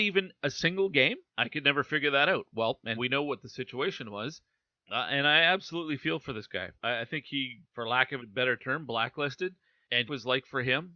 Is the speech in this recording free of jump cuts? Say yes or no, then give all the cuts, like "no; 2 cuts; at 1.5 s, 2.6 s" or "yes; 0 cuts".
no; 6 cuts; at 1.3 s, 3.0 s, 6.7 s, 7.6 s, 8.2 s, 10.1 s